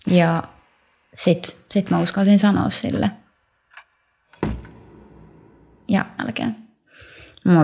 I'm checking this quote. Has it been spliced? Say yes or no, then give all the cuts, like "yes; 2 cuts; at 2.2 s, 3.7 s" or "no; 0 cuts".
yes; 1 cut; at 6.2 s